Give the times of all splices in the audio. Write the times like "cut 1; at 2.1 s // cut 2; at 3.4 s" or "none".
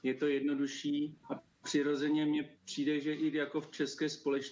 cut 1; at 1.2 s